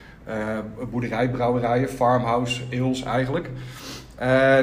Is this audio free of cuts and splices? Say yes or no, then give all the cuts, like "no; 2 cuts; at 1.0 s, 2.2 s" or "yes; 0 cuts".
yes; 0 cuts